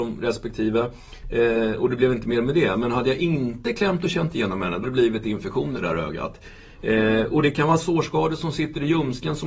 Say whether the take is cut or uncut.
cut